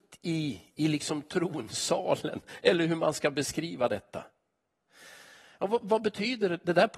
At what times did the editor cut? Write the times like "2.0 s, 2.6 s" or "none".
none